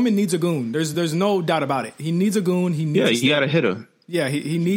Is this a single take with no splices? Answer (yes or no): yes